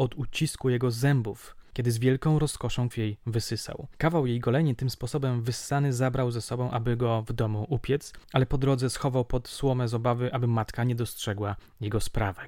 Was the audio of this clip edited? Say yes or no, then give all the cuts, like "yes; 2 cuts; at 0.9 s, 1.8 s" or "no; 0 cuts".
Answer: yes; 1 cut; at 2.9 s